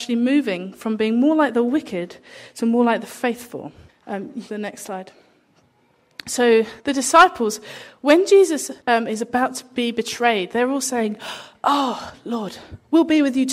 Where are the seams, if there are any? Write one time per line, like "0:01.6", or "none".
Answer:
0:03.9
0:04.5
0:06.8
0:08.8